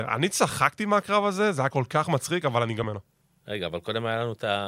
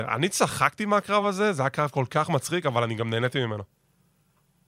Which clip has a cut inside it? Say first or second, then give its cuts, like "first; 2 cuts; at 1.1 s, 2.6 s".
first; 3 cuts; at 1.7 s, 2.8 s, 3.2 s